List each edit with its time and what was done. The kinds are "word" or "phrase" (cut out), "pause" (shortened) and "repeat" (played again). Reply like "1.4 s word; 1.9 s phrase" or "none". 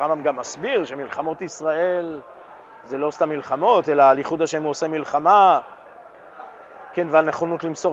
none